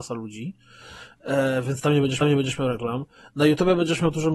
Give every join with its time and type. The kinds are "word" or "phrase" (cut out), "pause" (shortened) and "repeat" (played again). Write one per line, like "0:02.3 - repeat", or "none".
0:02.2 - repeat